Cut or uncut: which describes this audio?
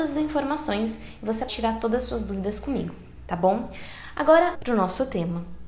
cut